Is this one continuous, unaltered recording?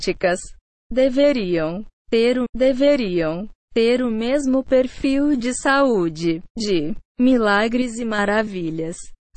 no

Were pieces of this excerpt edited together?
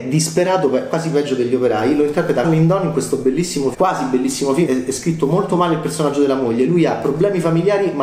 yes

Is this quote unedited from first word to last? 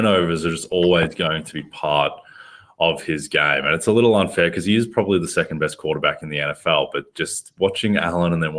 yes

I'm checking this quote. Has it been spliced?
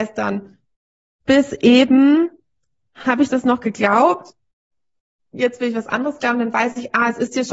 no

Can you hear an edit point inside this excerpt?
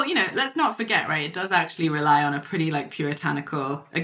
no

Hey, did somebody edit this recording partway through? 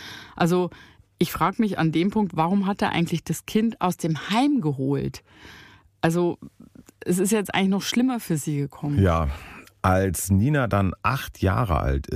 no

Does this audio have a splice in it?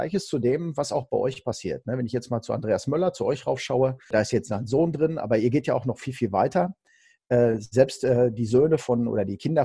no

